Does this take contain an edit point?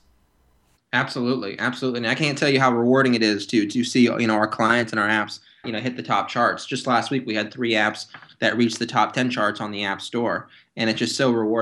yes; 1 cut; at 5.6 s

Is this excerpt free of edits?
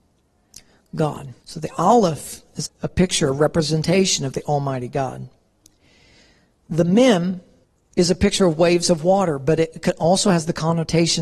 no; 3 cuts; at 1.4 s, 2.6 s, 7.6 s

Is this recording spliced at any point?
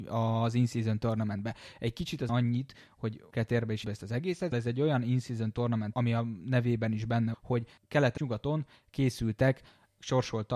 yes; 7 cuts; at 2.3 s, 3.3 s, 3.8 s, 4.5 s, 5.9 s, 7.3 s, 8.2 s

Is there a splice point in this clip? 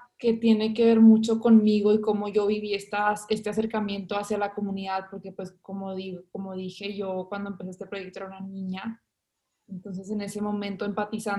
no; 0 cuts

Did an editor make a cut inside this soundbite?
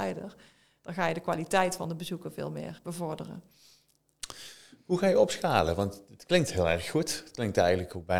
yes; 1 cut; at 2.8 s

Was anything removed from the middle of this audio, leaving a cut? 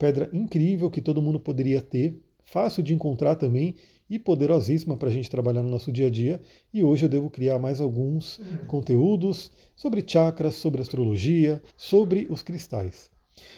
yes; 1 cut; at 11.7 s

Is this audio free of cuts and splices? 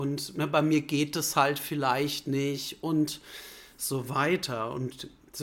yes; 0 cuts

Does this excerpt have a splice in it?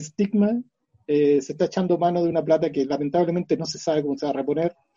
no; 0 cuts

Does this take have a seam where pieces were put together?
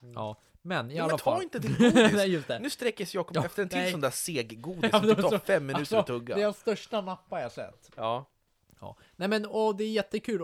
no; 0 cuts

